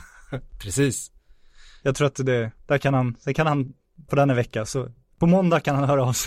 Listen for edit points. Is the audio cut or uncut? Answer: cut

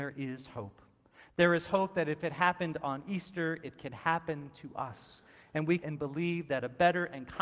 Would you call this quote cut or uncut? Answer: cut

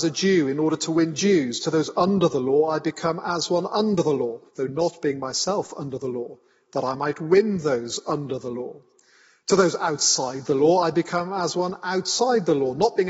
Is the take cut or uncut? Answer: cut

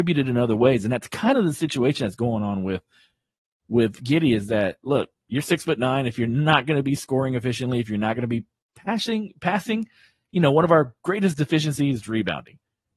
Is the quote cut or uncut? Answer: uncut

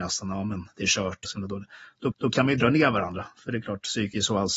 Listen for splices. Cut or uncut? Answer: cut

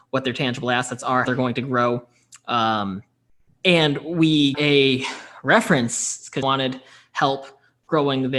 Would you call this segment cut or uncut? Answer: cut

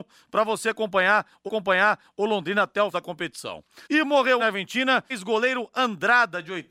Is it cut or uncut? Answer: cut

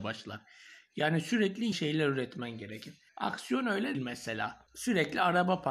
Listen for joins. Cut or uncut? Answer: cut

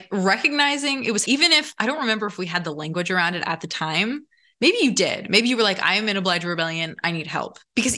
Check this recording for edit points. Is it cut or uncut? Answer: cut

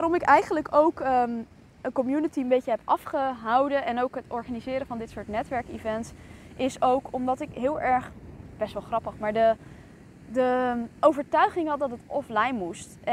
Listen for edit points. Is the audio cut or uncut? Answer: uncut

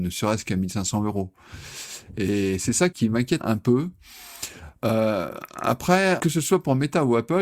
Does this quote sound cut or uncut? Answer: cut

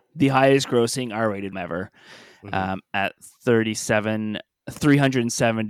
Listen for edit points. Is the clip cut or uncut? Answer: cut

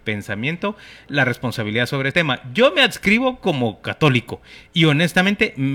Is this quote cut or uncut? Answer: cut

